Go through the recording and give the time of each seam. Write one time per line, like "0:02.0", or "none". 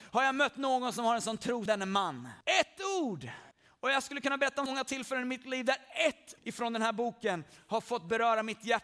0:01.7
0:02.4
0:03.5
0:04.7
0:06.4